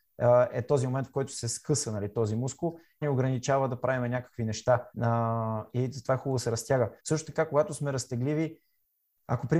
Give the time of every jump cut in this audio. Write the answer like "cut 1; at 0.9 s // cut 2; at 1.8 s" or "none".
cut 1; at 3.0 s // cut 2; at 4.9 s // cut 3; at 7.0 s